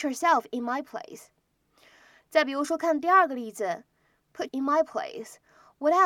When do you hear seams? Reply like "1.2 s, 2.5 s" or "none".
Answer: 4.5 s